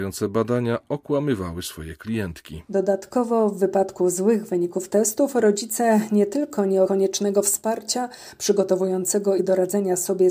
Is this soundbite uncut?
no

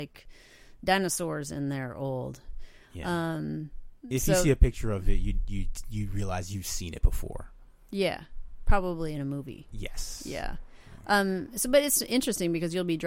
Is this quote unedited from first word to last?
no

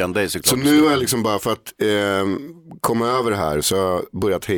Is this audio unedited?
yes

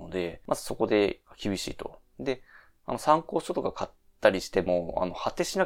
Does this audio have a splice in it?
no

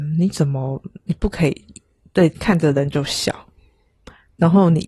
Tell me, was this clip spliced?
no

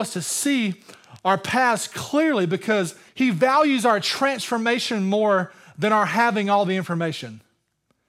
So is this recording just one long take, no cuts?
no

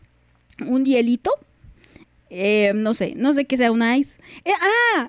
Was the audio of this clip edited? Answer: no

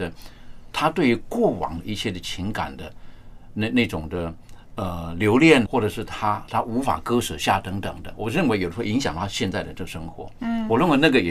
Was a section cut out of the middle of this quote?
yes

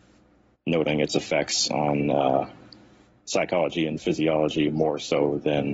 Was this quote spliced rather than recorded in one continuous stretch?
no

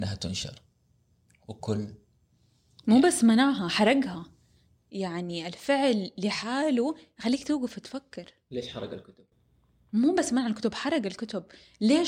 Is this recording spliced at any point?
yes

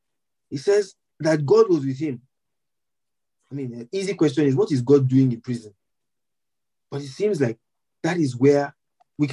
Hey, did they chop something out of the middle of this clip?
no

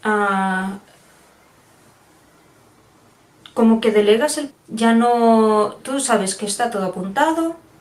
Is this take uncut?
no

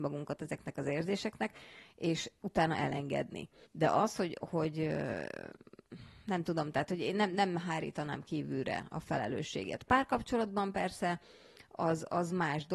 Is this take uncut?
no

